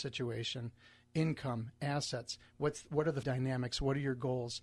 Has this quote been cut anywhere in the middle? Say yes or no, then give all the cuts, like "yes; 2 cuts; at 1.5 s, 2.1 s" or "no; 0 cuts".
yes; 1 cut; at 3.2 s